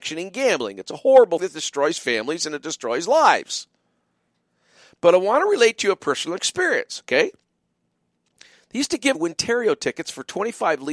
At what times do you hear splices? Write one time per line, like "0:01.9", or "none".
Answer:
0:01.4
0:09.1